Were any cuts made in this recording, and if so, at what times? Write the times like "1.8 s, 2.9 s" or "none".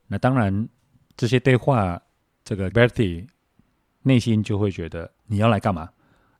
2.2 s, 2.7 s, 5.2 s